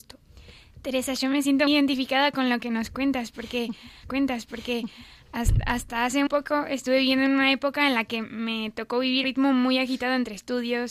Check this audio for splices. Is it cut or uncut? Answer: cut